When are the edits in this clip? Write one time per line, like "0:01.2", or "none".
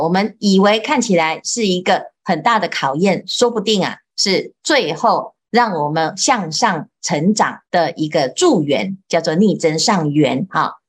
0:07.7